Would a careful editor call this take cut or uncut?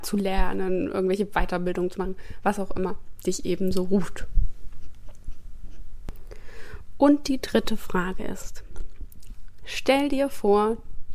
uncut